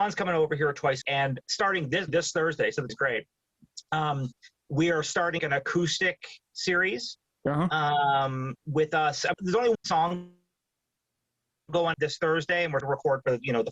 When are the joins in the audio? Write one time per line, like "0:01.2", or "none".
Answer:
0:01.0
0:01.4
0:02.1
0:02.9
0:05.4
0:09.3
0:09.7
0:11.9
0:12.8